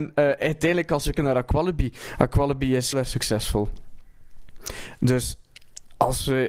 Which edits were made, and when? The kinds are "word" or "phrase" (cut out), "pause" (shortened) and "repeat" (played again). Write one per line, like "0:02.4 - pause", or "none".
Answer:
0:01.2 - word
0:02.9 - word